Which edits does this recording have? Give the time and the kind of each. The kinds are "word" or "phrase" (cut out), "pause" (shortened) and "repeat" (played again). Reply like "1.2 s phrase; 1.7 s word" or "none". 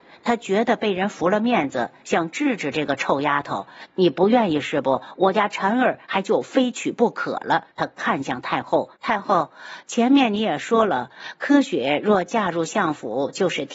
7.7 s pause; 9.0 s pause